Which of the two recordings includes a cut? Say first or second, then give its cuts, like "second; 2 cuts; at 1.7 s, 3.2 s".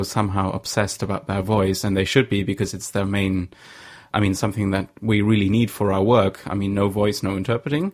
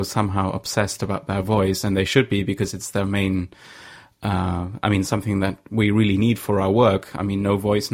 first; 1 cut; at 4.1 s